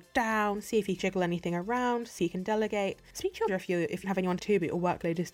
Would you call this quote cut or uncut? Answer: cut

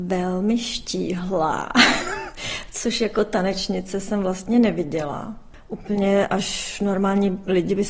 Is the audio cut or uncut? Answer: uncut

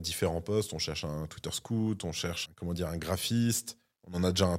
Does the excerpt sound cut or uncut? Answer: cut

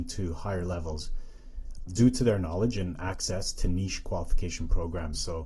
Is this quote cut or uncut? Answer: cut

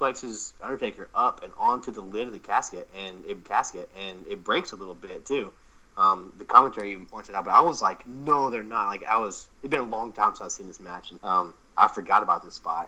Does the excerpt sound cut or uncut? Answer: cut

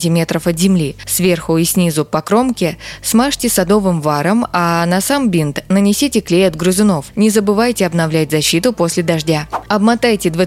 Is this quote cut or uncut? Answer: uncut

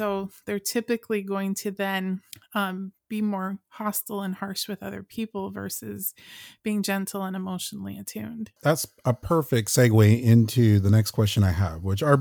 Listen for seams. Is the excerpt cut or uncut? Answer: cut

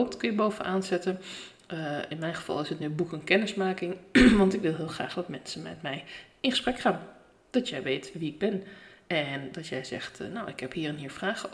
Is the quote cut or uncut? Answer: uncut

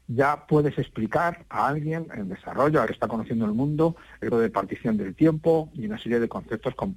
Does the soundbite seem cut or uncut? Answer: cut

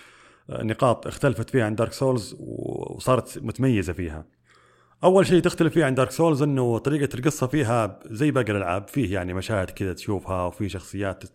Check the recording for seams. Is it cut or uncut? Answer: uncut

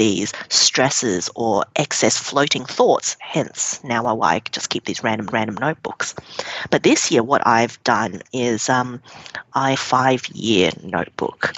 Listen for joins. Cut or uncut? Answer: cut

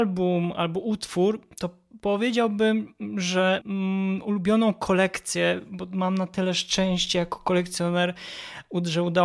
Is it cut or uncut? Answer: cut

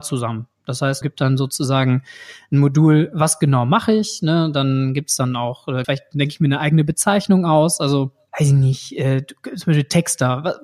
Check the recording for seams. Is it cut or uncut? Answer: cut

